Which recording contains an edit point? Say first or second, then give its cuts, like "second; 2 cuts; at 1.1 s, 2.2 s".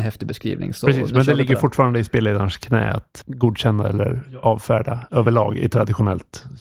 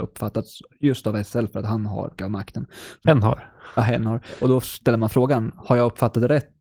second; 1 cut; at 2.2 s